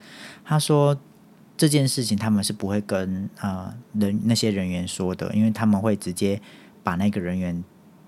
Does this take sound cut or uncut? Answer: uncut